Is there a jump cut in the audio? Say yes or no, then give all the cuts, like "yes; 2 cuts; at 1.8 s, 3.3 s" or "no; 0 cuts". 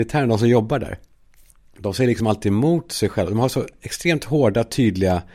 no; 0 cuts